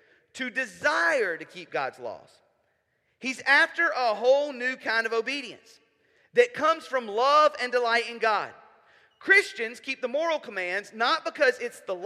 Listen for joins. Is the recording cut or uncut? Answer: uncut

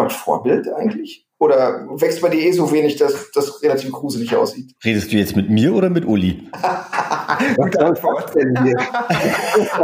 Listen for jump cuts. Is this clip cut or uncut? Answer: cut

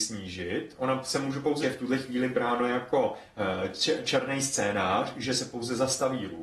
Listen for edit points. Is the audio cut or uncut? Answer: cut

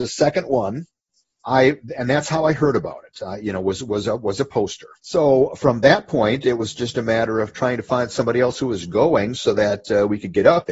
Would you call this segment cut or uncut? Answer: cut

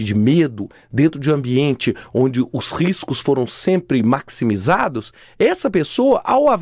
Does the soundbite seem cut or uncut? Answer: uncut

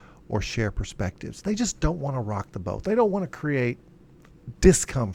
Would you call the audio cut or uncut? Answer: uncut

